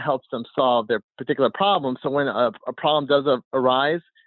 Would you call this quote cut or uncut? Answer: cut